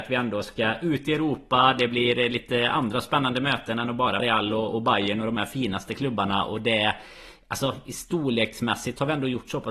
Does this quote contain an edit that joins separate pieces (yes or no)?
yes